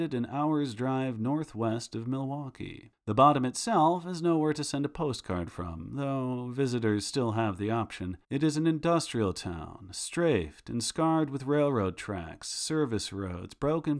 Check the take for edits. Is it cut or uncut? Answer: cut